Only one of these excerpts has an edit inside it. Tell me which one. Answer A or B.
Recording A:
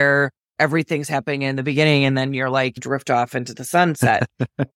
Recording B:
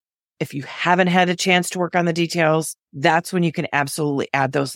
B